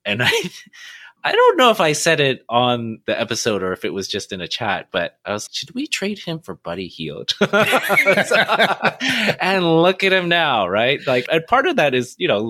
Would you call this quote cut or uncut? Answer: cut